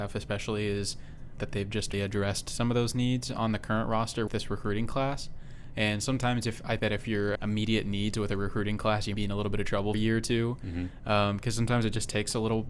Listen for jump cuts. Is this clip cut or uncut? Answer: cut